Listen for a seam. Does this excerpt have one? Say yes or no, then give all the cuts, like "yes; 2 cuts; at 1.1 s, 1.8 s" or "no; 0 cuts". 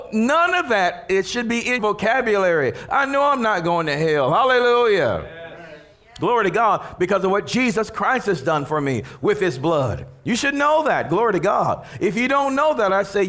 yes; 1 cut; at 1.8 s